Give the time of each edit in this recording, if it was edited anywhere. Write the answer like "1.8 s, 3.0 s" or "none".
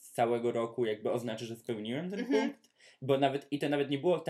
none

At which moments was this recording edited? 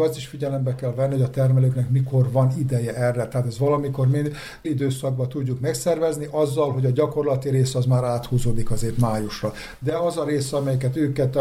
4.6 s

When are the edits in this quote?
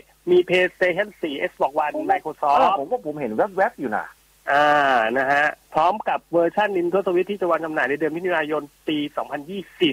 none

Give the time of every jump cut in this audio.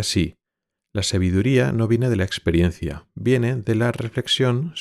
none

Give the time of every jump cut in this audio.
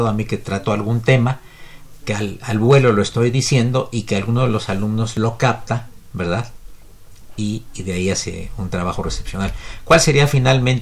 none

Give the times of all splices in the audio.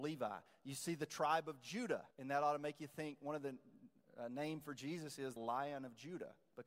2.1 s, 5.4 s

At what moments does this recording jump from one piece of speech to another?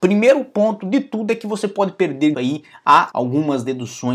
2.3 s, 3.1 s

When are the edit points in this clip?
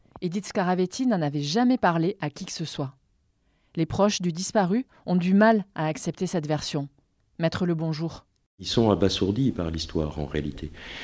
none

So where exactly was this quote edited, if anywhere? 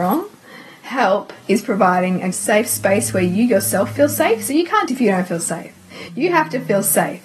2.3 s, 4.9 s

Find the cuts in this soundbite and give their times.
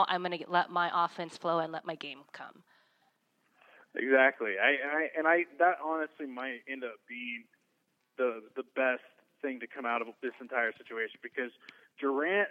none

